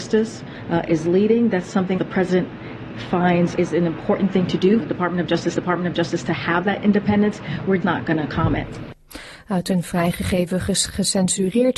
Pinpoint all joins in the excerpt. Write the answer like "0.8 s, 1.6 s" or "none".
2.0 s, 3.6 s, 4.8 s, 5.5 s, 7.8 s